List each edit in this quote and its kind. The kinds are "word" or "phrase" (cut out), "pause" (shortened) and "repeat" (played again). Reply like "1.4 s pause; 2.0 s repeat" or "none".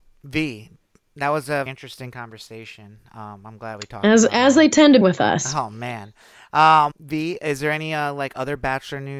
1.7 s word; 5.0 s word; 6.9 s word

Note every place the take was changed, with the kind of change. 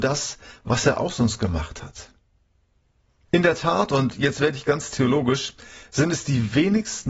none

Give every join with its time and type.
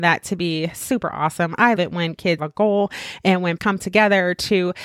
1.8 s word; 2.4 s word; 3.6 s word

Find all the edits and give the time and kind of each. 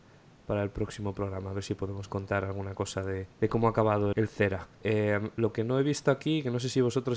3.3 s pause; 4.1 s word; 4.7 s pause

